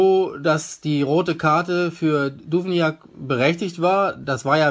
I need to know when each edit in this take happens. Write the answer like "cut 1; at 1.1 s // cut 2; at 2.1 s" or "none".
none